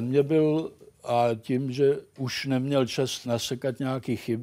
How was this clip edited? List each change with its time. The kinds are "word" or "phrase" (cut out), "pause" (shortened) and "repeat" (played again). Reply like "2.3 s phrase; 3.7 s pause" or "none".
3.2 s word